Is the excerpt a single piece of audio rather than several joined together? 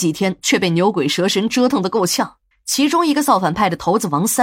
no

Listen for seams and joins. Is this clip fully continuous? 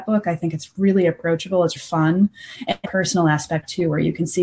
no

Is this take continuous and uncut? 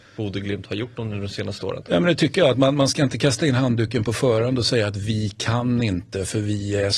yes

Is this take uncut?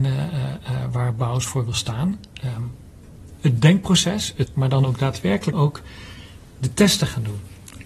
no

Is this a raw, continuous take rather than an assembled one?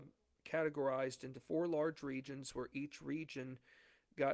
yes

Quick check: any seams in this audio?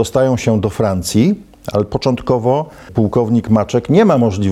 no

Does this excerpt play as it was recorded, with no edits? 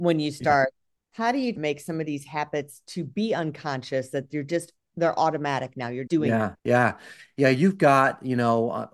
no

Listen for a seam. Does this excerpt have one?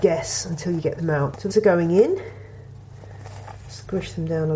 yes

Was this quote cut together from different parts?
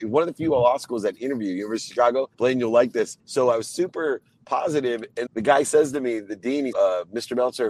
yes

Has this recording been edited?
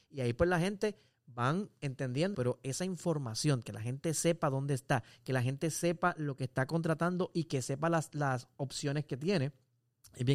yes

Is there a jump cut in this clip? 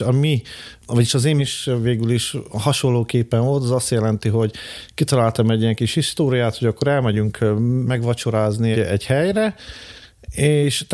yes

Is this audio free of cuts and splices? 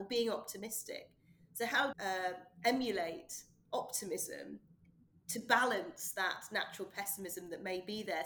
no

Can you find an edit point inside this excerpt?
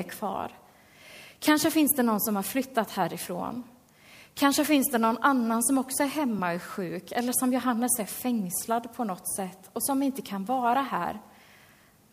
no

